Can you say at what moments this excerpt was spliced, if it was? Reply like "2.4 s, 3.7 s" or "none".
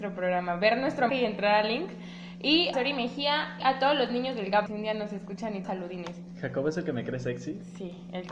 1.1 s, 2.7 s, 3.6 s, 4.7 s, 5.6 s